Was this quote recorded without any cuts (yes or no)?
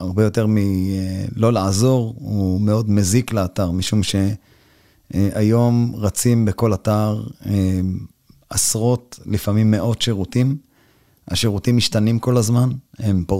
yes